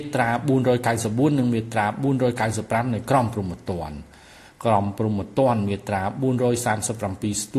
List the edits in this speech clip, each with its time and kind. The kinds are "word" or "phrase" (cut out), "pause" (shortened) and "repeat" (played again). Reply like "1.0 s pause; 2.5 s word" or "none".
none